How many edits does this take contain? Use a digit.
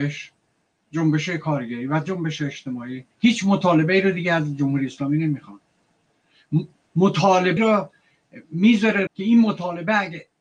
3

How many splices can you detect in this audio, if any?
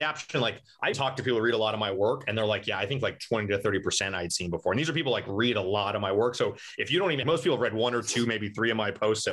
2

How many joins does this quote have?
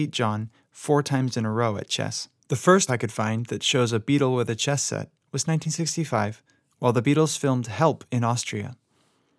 3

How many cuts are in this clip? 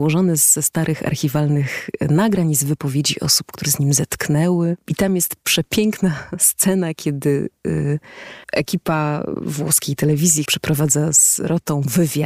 3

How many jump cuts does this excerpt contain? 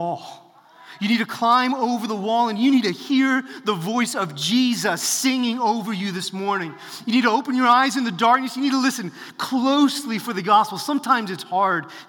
0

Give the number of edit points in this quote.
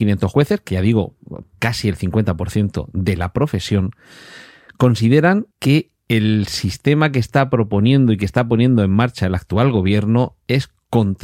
1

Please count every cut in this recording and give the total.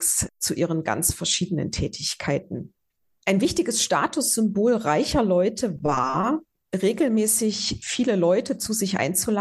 0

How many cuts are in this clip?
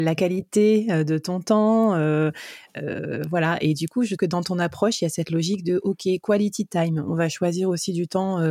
1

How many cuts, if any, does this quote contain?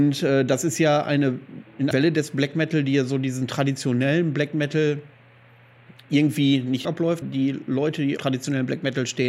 4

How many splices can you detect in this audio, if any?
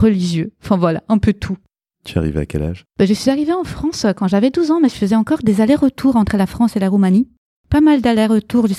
1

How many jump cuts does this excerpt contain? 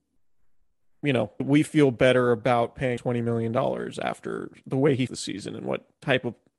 3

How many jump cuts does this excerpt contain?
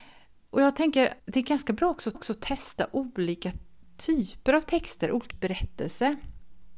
3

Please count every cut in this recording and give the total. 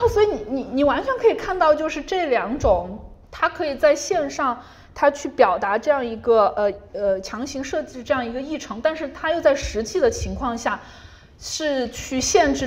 1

